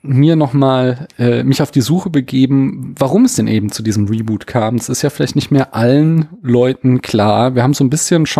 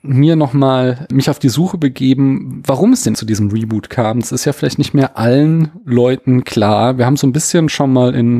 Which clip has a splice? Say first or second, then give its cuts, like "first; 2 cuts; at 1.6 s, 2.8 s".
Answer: second; 2 cuts; at 1.1 s, 3.1 s